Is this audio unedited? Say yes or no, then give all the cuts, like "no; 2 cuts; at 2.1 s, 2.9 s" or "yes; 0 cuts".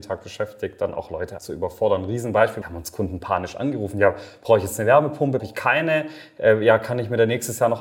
no; 3 cuts; at 1.4 s, 2.6 s, 5.4 s